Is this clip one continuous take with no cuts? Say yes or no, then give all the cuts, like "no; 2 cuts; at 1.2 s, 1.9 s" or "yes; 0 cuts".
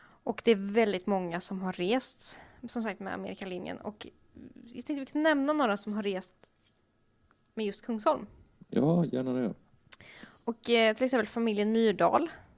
yes; 0 cuts